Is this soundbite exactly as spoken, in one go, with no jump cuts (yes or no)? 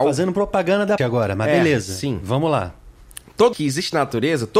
no